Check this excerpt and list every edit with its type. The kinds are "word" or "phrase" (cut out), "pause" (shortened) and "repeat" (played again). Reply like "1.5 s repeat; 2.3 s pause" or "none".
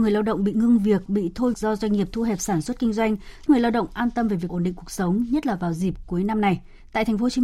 1.1 s word; 1.5 s word; 3.5 s word; 4.5 s word